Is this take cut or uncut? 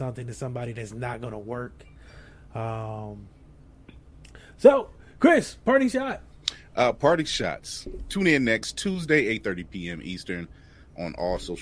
uncut